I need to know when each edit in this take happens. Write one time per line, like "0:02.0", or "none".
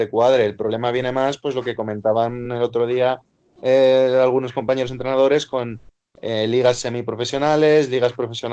none